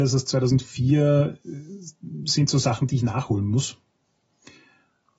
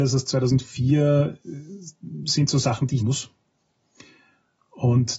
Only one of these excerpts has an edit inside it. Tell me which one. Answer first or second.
second